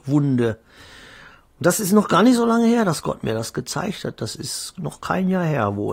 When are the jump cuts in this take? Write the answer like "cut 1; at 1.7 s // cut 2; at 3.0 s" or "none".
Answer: none